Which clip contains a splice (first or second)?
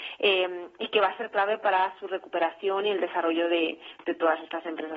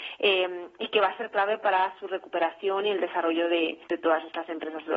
second